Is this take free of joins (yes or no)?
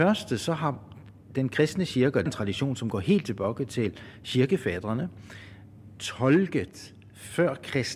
no